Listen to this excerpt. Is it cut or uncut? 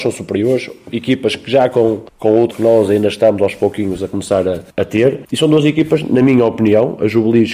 cut